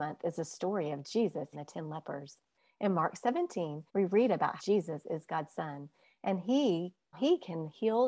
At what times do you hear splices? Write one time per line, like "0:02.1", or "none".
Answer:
0:01.5
0:03.9
0:04.6
0:07.1

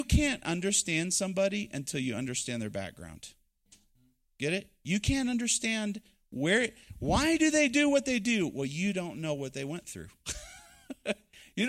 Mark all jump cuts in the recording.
none

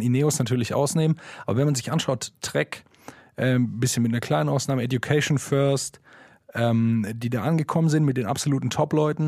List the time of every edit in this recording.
none

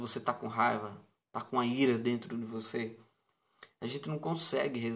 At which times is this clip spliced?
none

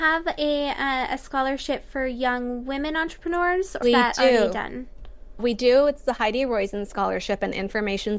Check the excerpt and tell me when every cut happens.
0:03.8
0:05.4

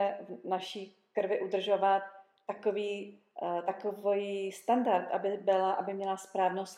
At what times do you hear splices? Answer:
none

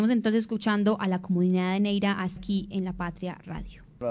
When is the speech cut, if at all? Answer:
0:02.4

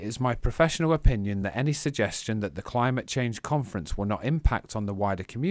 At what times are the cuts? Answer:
none

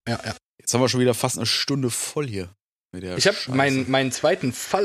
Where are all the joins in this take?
none

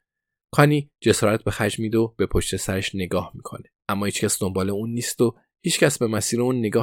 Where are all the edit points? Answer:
0:03.8

